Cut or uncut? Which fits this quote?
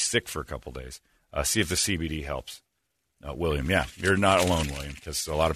uncut